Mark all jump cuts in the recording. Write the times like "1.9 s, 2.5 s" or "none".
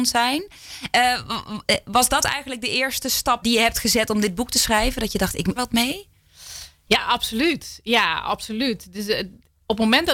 3.4 s, 5.6 s